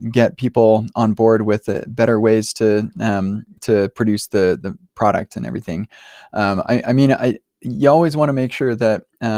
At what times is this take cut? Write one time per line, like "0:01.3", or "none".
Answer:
0:03.6